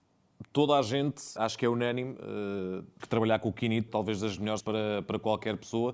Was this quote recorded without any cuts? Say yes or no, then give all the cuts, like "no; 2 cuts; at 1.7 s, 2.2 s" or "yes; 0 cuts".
no; 4 cuts; at 1.4 s, 3.0 s, 3.9 s, 4.6 s